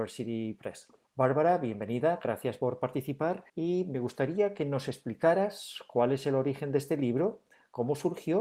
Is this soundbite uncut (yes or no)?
no